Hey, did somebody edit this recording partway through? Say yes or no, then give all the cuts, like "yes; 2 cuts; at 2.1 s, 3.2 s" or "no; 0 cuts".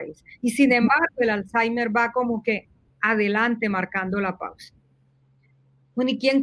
no; 0 cuts